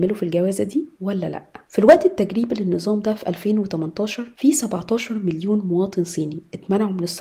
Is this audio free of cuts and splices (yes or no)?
yes